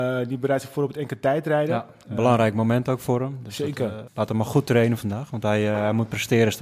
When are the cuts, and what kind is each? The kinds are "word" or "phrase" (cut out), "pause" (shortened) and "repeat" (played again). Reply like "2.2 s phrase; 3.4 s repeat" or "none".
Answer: 4.1 s word